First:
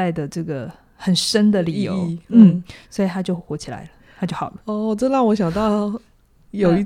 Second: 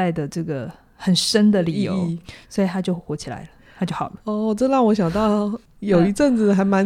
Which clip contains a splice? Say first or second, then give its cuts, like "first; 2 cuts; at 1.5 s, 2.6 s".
second; 2 cuts; at 2.2 s, 5.7 s